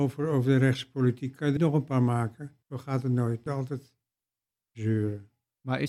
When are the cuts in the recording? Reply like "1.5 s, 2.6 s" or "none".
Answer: 1.6 s, 2.6 s, 3.5 s

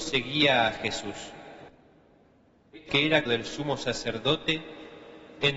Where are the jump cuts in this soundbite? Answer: 2.9 s, 3.3 s

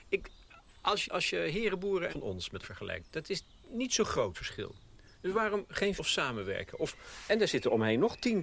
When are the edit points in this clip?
1.0 s, 2.1 s, 2.6 s, 4.3 s, 6.0 s, 7.3 s

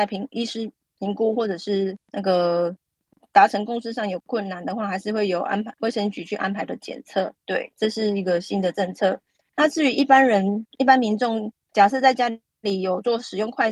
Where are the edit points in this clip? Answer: 2.0 s, 6.7 s, 7.4 s, 11.6 s

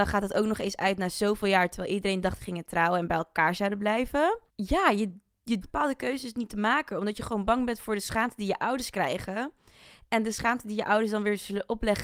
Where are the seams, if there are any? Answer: 2.4 s, 4.5 s, 5.6 s

